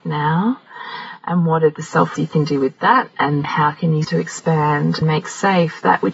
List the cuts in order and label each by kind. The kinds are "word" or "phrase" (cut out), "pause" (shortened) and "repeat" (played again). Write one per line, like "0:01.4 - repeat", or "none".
0:02.2 - phrase
0:03.4 - word
0:04.0 - word
0:05.0 - word